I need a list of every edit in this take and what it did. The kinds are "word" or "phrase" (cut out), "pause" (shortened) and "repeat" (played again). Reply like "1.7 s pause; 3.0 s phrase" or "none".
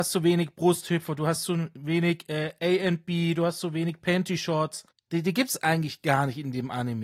4.9 s pause

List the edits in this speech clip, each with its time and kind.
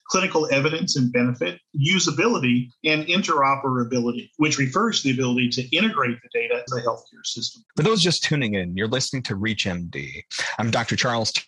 6.7 s word; 7.7 s pause

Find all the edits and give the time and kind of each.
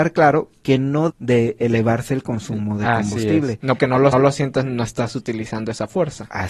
1.1 s word; 3.8 s word; 4.1 s repeat

